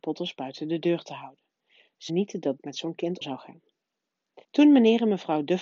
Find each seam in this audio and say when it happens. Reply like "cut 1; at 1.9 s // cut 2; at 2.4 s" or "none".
cut 1; at 2.1 s // cut 2; at 2.6 s // cut 3; at 3.2 s // cut 4; at 4.4 s